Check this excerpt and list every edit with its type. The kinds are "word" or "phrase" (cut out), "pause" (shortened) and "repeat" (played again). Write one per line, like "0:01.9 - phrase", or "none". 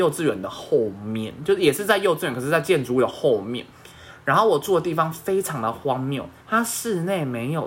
0:06.4 - pause